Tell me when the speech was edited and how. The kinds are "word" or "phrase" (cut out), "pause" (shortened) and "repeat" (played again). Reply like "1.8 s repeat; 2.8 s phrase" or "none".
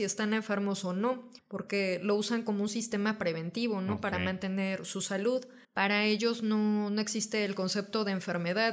1.4 s pause; 5.6 s pause